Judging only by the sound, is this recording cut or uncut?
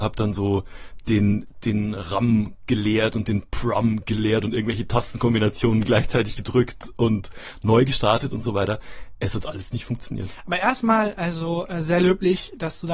uncut